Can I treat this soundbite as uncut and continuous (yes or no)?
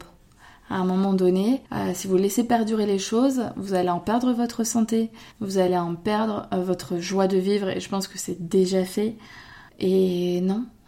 no